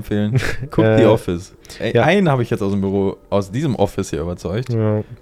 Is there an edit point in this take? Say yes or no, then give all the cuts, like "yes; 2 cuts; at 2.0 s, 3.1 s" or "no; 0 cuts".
no; 0 cuts